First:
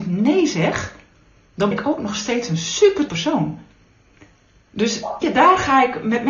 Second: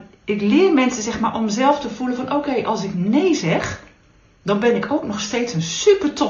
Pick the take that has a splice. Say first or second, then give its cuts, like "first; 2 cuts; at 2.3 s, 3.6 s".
first; 3 cuts; at 1.7 s, 3.1 s, 5.2 s